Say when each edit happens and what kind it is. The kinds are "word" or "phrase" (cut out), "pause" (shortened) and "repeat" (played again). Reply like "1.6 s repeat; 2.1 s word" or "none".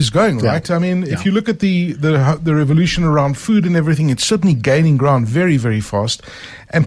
none